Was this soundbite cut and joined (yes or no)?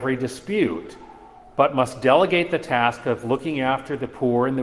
no